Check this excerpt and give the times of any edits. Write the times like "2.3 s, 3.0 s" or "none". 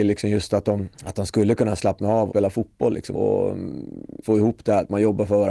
0.9 s, 2.3 s, 3.1 s, 4.2 s